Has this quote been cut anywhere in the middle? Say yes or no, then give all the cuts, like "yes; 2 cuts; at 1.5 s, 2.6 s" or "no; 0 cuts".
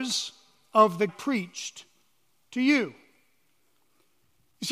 yes; 1 cut; at 1.1 s